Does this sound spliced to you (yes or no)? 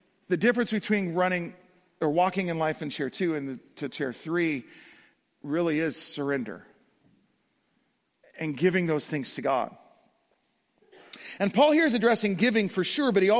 no